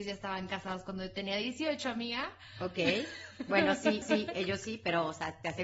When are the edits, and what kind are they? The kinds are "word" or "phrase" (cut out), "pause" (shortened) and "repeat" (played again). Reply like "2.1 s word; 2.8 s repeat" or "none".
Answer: 4.0 s repeat